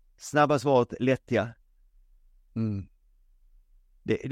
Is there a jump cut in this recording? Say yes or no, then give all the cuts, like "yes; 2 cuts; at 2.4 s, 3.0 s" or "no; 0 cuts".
no; 0 cuts